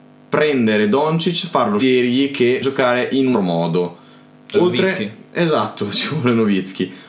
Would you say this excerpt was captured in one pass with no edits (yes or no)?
no